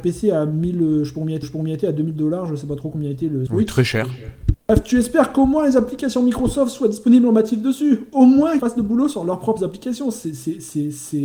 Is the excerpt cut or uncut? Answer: cut